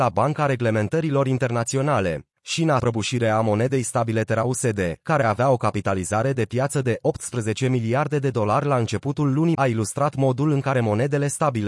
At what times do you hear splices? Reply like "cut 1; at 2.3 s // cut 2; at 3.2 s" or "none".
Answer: cut 1; at 2.3 s // cut 2; at 2.8 s // cut 3; at 9.5 s